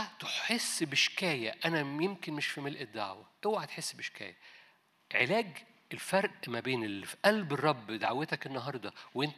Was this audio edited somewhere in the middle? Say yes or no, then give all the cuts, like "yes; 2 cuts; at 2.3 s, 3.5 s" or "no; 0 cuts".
no; 0 cuts